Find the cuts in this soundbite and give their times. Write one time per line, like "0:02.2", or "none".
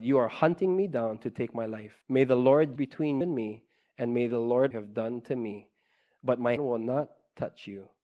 0:02.0
0:02.8
0:03.2
0:04.7
0:06.6